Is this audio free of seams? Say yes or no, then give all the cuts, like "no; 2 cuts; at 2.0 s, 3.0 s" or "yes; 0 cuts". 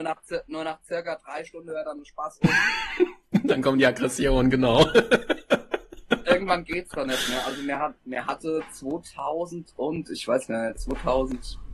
no; 1 cut; at 8.0 s